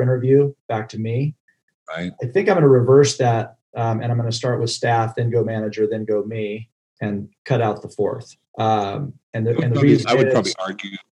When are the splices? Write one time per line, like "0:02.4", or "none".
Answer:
0:02.1
0:06.9
0:08.5